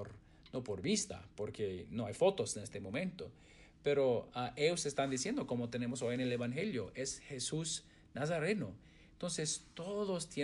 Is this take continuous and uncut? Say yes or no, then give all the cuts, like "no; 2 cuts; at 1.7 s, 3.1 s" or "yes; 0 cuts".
yes; 0 cuts